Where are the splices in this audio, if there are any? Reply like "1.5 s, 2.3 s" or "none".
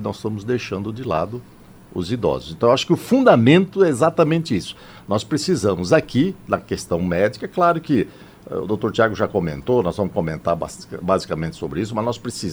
none